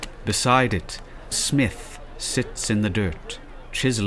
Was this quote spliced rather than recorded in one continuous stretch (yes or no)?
yes